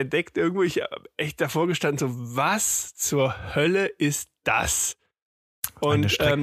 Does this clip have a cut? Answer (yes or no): no